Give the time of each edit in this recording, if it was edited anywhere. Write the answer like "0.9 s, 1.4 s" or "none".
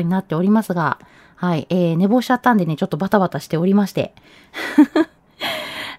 none